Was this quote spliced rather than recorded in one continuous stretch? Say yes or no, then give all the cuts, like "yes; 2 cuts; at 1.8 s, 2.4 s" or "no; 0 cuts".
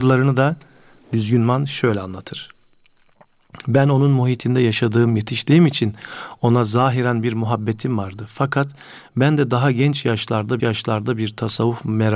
yes; 1 cut; at 10.6 s